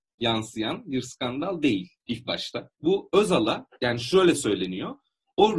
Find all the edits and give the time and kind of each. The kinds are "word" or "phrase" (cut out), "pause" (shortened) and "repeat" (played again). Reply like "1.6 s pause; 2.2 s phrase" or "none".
2.0 s pause; 2.7 s pause